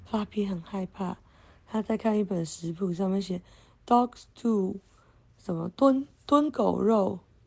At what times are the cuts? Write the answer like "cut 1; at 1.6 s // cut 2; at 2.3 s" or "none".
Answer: none